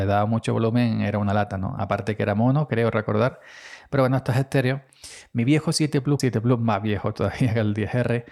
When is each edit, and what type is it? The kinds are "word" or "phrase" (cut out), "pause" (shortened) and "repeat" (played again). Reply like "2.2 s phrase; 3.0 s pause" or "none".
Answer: 6.2 s phrase